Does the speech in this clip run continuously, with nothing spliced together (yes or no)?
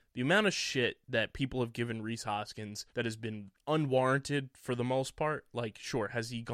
no